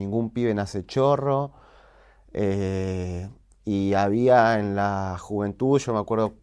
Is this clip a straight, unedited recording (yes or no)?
yes